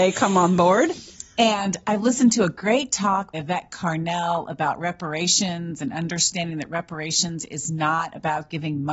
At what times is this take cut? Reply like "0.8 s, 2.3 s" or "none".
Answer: 3.3 s